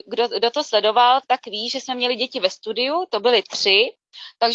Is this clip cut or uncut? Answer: cut